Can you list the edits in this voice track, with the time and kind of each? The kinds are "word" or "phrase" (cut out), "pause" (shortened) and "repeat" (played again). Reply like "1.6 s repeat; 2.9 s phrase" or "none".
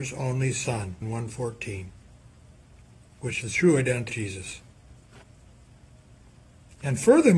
1.0 s word; 3.4 s word; 4.1 s word

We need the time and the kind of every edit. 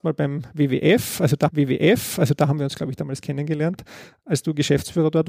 1.5 s repeat

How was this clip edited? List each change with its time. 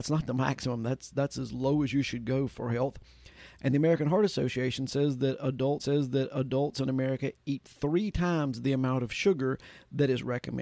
5.8 s repeat

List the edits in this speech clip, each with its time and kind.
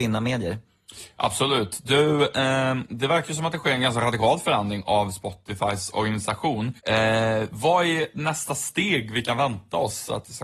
6.8 s pause

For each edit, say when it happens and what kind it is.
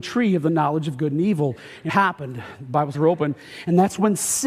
1.9 s word; 2.9 s phrase

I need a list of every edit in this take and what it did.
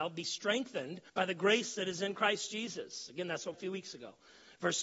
1.1 s pause; 3.5 s phrase

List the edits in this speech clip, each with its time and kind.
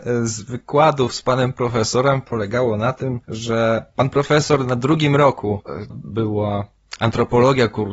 3.2 s pause; 5.9 s phrase

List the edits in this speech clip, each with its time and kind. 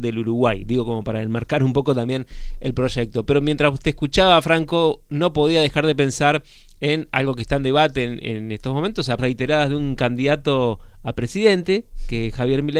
9.2 s phrase

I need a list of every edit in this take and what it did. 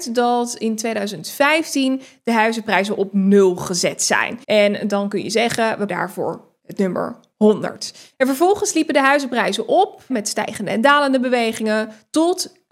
4.4 s pause; 5.9 s word; 8.1 s pause; 10.1 s word

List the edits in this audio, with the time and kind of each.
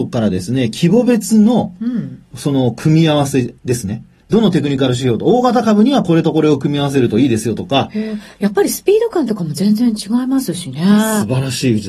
3.6 s pause

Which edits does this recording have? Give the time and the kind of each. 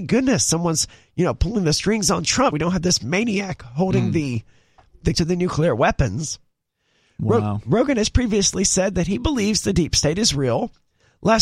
2.5 s word; 5.1 s word

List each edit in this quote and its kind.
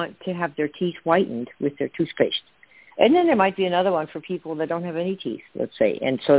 none

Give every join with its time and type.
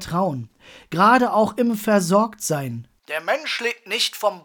3.0 s pause

